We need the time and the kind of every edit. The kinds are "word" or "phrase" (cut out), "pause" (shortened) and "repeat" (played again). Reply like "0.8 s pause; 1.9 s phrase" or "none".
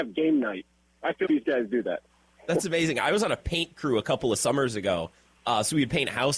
1.3 s word